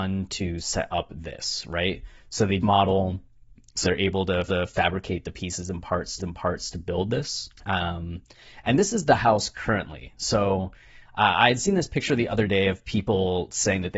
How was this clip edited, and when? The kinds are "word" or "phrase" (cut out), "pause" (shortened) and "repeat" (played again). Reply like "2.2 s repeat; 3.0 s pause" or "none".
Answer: 2.6 s phrase; 3.8 s word; 4.5 s repeat; 6.2 s repeat; 7.6 s pause